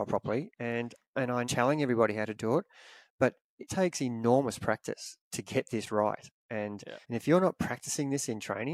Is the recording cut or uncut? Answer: cut